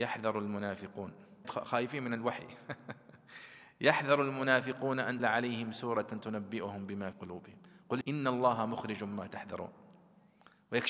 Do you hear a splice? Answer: yes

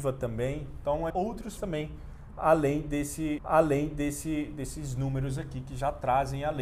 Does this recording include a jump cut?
yes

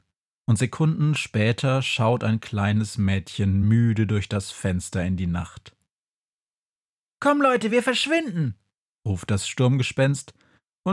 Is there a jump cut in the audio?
no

